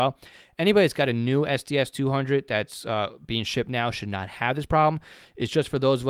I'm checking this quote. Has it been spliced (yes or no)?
no